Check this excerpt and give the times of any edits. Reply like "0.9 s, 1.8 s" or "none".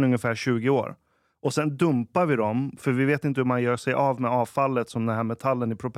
none